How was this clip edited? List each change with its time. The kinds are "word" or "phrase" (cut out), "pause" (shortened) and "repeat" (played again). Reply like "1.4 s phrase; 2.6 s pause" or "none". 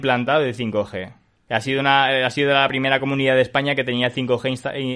none